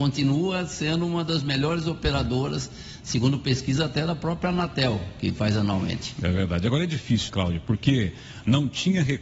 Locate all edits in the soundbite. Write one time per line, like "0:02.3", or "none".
0:07.3